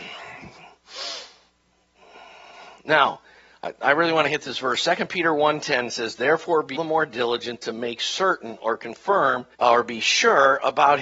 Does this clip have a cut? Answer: yes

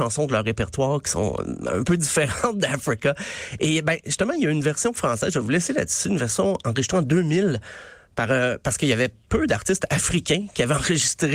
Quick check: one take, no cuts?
yes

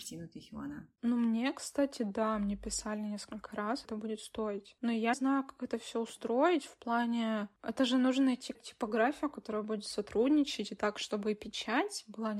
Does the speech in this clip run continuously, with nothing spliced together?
no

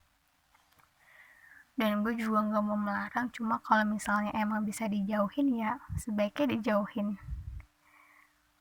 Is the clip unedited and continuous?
yes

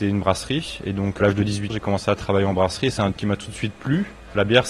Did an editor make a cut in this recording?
yes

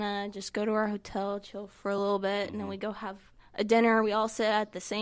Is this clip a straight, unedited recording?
yes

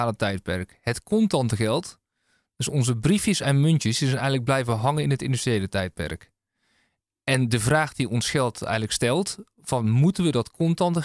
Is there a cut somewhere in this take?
no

